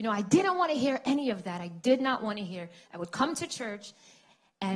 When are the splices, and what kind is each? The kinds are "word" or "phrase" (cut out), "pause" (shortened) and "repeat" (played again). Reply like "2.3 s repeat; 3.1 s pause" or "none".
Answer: none